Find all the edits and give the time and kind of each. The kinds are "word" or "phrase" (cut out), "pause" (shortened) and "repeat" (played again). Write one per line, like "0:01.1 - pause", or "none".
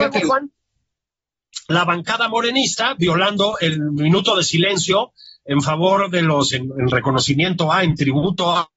none

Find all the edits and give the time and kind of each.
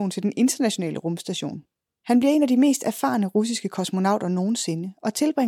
none

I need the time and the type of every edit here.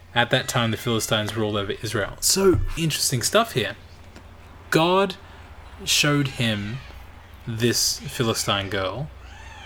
0:02.8 - word

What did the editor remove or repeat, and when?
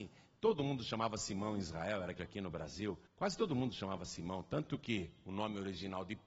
0:02.2 - phrase
0:03.1 - pause

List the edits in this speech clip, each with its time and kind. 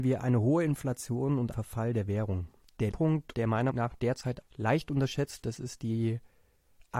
0:01.5 - word
0:02.9 - word
0:03.3 - word
0:03.7 - word
0:04.4 - word
0:05.4 - word

